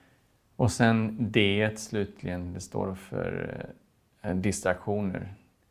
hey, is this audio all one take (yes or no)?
yes